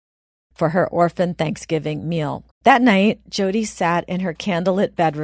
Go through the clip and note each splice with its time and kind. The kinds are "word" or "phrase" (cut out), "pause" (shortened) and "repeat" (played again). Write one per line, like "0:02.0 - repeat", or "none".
0:02.5 - pause